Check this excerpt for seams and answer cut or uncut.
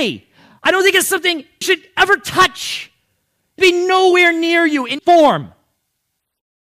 cut